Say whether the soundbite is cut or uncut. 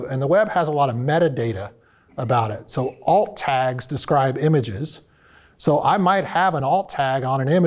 uncut